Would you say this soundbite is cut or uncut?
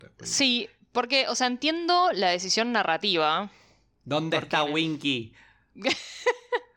uncut